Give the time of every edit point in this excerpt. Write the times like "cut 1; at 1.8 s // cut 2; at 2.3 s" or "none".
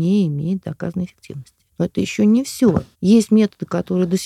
cut 1; at 2.9 s